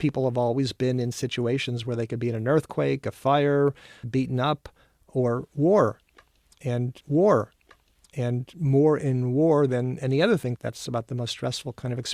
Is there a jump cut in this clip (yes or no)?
yes